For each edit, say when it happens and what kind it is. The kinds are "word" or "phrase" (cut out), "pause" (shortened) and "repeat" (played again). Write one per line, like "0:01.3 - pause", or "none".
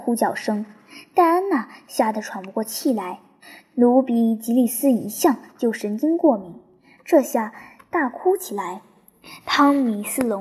none

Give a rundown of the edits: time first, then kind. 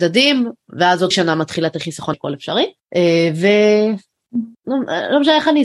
0:01.1 - word
0:02.1 - word

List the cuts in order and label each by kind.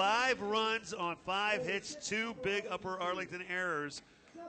none

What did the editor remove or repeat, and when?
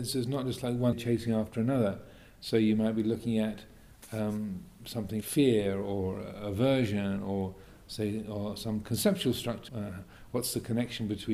0:00.9 - word
0:05.2 - word
0:09.7 - word

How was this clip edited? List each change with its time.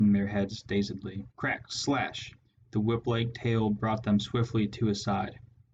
0:01.3 - pause
0:02.4 - pause

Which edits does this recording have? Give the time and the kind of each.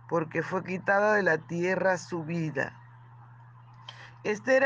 none

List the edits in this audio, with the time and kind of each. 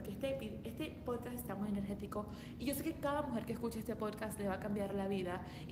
0:01.5 - word

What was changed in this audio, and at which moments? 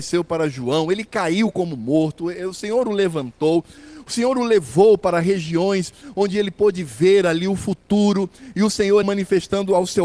0:09.0 - word

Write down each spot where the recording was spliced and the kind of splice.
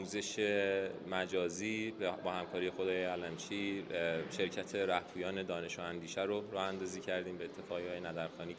none

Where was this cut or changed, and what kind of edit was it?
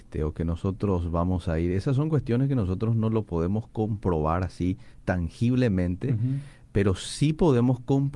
none

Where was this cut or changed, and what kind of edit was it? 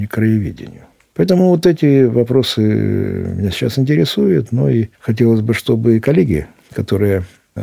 none

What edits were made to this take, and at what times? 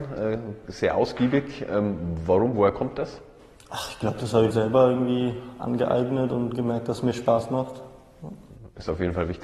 0:04.5 - word

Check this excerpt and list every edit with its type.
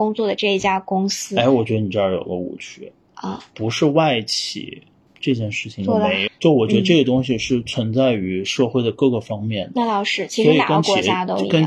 0:06.3 - word

